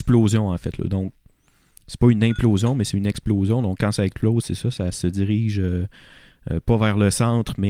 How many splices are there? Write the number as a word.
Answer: zero